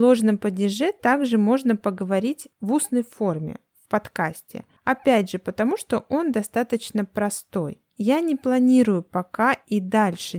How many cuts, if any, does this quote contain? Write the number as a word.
three